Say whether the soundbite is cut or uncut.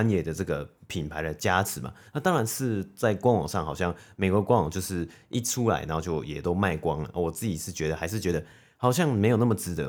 uncut